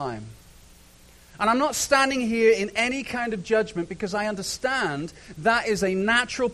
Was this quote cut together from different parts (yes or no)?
no